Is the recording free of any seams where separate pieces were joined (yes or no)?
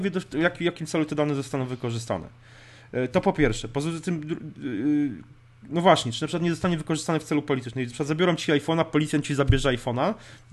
yes